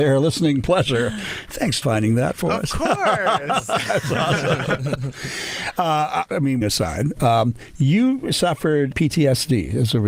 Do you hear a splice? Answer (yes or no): yes